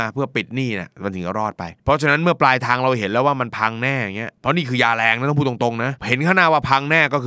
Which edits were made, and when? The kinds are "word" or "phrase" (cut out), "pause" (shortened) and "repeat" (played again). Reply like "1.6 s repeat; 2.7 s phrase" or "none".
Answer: 1.8 s pause; 4.4 s pause; 6.0 s pause